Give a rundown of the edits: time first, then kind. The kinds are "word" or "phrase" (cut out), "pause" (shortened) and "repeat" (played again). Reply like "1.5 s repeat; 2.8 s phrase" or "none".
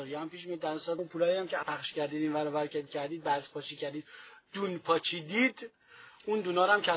1.0 s word; 1.6 s word; 2.9 s word